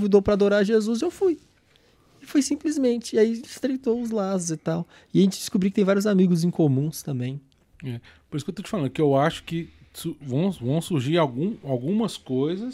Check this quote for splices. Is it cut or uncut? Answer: uncut